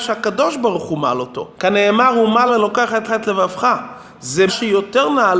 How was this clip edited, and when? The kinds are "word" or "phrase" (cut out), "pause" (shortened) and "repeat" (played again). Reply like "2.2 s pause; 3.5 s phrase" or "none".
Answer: 1.5 s pause; 2.5 s word; 3.1 s repeat; 4.5 s word